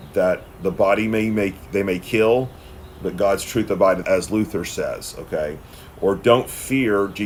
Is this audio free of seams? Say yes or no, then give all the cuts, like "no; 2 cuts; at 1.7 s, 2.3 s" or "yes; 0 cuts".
no; 1 cut; at 4.0 s